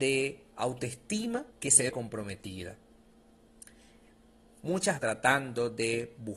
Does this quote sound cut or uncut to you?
cut